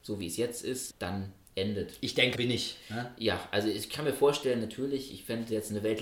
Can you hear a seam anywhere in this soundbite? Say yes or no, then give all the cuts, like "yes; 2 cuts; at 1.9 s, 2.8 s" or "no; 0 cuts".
yes; 2 cuts; at 0.9 s, 2.4 s